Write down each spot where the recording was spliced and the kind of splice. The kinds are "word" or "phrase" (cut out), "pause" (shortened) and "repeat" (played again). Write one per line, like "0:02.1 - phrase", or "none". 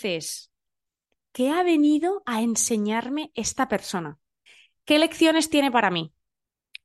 0:04.5 - pause